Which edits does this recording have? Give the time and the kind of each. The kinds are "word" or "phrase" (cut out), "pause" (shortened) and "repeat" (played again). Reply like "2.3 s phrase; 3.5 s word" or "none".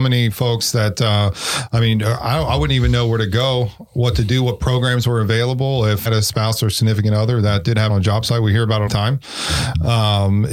6.1 s phrase; 7.9 s phrase; 8.9 s word

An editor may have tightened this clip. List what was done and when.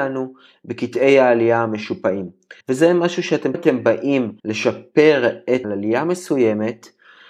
2.6 s pause; 3.5 s phrase; 4.4 s pause; 5.6 s phrase

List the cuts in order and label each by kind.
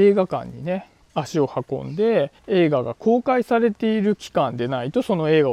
1.0 s pause; 2.4 s pause

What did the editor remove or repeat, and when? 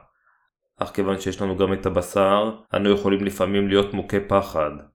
2.6 s pause

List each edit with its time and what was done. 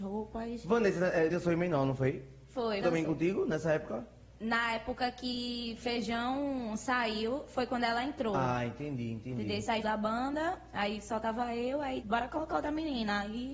1.3 s word; 2.8 s phrase; 9.8 s phrase; 12.0 s word

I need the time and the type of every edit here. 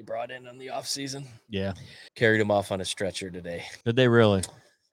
2.1 s pause; 3.8 s pause

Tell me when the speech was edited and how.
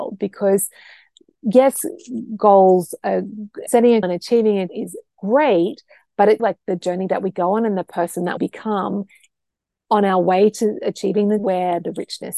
3.7 s word; 4.0 s word; 4.7 s word; 6.4 s word; 8.4 s word; 11.4 s word

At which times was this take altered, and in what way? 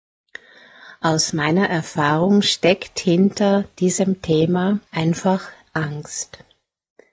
4.9 s pause

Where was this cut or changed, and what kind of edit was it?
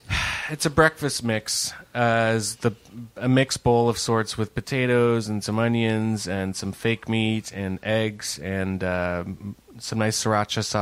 none

